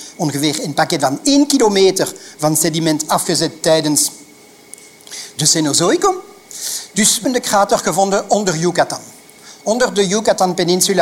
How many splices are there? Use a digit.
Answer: 1